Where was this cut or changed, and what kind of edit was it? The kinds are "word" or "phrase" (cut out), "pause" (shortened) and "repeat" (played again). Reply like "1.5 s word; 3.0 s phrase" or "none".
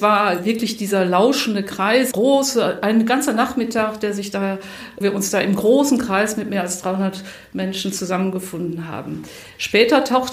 2.1 s word; 5.0 s word